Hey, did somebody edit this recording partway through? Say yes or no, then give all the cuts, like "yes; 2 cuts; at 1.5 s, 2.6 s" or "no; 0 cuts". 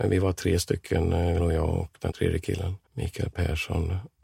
yes; 3 cuts; at 1.4 s, 2.1 s, 2.8 s